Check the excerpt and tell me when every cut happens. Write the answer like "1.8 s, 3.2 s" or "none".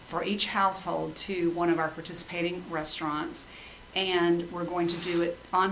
none

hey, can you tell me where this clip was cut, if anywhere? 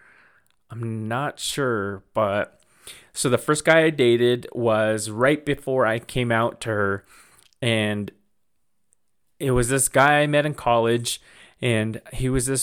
none

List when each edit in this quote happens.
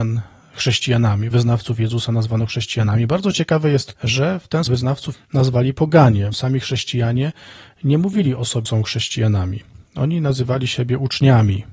1.3 s, 3.9 s, 4.7 s, 5.1 s, 6.3 s, 8.7 s

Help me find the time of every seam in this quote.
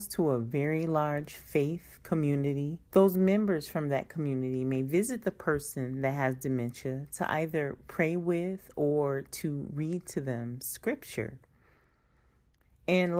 2.9 s

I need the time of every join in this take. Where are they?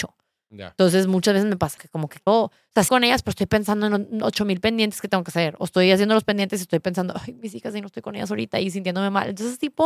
1.8 s, 2.3 s, 2.9 s

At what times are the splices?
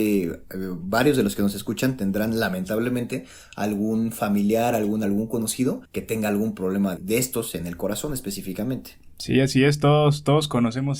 5.0 s, 5.8 s, 7.0 s

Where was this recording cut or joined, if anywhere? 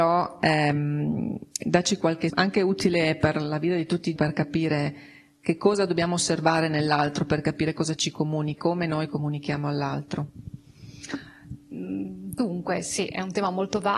2.3 s, 4.2 s, 8.6 s

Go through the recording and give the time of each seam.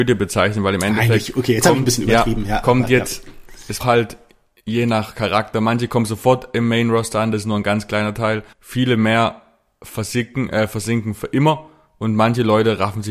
3.8 s, 8.5 s

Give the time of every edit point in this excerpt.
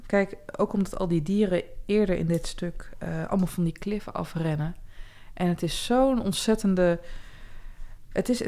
none

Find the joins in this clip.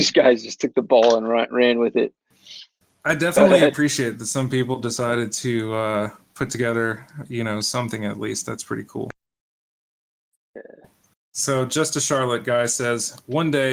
none

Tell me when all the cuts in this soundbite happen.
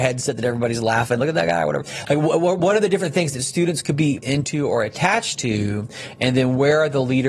4.2 s

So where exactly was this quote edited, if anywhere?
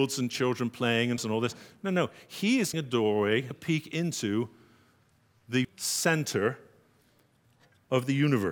1.2 s, 2.7 s, 3.5 s, 5.6 s

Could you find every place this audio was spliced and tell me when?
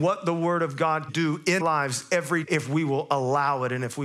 1.1 s, 1.6 s, 2.4 s

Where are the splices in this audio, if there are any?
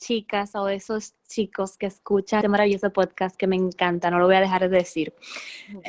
2.4 s

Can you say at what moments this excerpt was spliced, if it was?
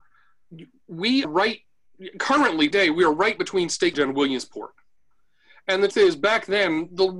1.2 s, 2.7 s, 3.9 s, 5.9 s

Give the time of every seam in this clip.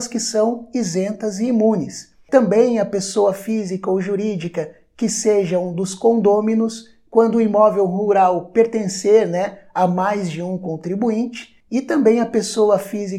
11.6 s

